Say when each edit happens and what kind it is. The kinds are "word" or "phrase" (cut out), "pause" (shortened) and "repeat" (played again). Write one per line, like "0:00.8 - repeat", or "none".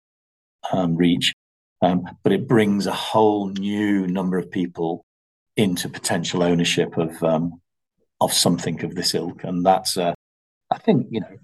none